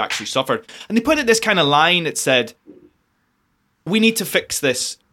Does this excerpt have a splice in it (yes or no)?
no